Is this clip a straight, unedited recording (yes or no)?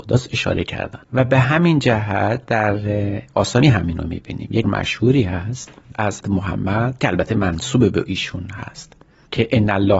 no